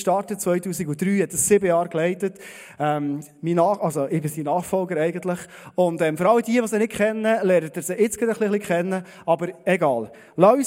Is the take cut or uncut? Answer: uncut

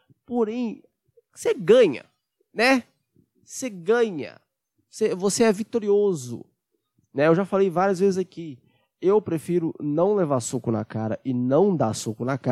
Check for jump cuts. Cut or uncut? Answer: uncut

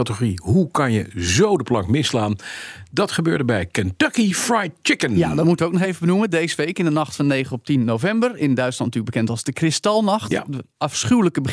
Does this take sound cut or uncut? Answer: uncut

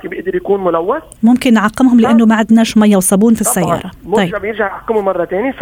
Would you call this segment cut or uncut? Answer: uncut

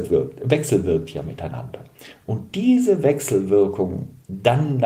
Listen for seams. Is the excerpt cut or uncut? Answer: uncut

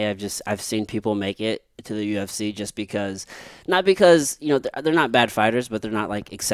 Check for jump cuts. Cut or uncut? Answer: uncut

